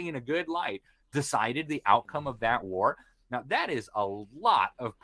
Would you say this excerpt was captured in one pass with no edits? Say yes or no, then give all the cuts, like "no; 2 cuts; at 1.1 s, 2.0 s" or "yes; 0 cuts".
yes; 0 cuts